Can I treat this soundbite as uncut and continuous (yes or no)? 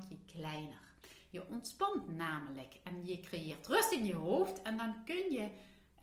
yes